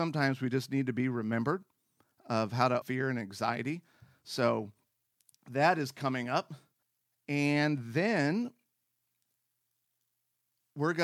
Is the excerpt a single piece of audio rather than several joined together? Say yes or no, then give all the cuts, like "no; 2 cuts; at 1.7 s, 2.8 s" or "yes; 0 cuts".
no; 2 cuts; at 2.8 s, 6.8 s